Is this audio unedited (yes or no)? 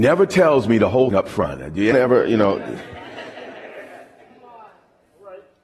no